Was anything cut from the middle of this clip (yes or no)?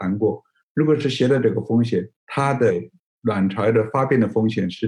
yes